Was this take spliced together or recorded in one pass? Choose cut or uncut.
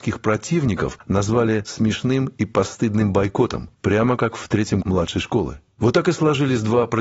cut